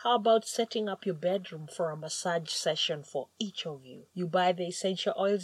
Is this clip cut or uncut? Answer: uncut